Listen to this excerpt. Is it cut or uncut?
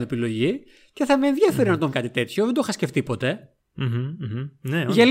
cut